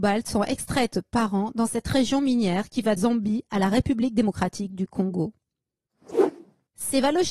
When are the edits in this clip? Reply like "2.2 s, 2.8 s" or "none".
3.0 s

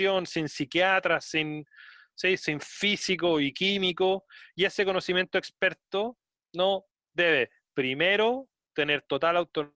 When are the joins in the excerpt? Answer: none

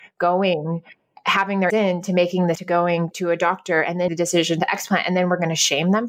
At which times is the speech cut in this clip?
1.2 s, 1.7 s, 2.6 s, 3.1 s, 4.1 s

